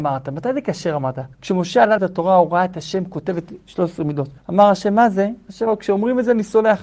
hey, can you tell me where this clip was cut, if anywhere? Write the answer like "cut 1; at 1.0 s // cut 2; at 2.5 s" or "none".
cut 1; at 1.3 s // cut 2; at 2.0 s // cut 3; at 4.4 s // cut 4; at 5.7 s